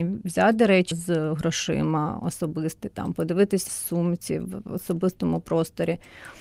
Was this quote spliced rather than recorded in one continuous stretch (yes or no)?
yes